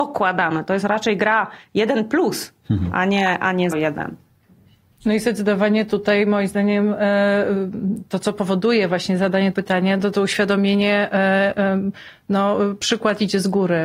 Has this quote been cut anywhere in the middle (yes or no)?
yes